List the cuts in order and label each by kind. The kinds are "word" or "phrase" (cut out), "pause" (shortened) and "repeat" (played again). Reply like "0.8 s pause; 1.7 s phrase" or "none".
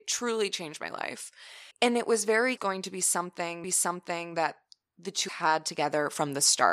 1.7 s pause; 2.6 s phrase; 3.6 s repeat; 5.3 s phrase